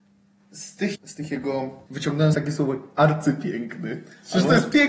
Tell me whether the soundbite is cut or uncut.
cut